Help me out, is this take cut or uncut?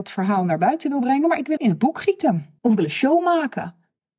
cut